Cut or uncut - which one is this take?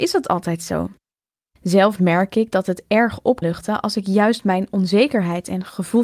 cut